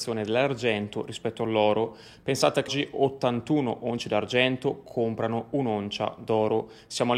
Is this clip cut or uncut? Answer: cut